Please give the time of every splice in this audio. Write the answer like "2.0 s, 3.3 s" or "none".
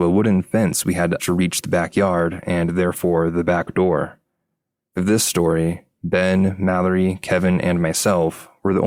1.2 s, 5.0 s